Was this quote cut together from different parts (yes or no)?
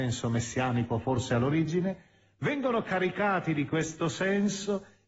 no